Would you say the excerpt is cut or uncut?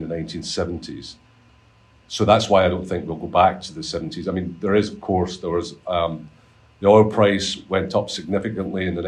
uncut